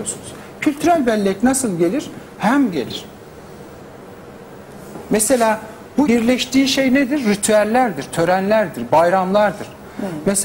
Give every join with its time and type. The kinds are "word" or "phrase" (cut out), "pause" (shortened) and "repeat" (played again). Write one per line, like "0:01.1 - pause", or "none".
0:02.7 - phrase
0:06.1 - word